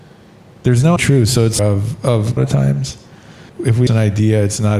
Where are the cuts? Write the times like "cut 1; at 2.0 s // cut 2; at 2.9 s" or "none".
cut 1; at 1.0 s // cut 2; at 1.6 s // cut 3; at 2.4 s // cut 4; at 3.5 s // cut 5; at 3.9 s